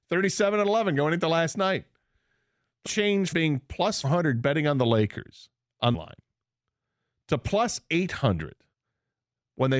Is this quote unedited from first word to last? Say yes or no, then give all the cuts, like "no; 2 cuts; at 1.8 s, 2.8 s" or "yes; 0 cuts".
no; 4 cuts; at 2.8 s, 3.3 s, 4.0 s, 5.9 s